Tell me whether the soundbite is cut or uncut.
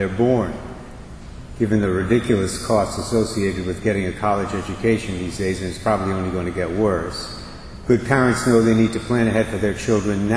uncut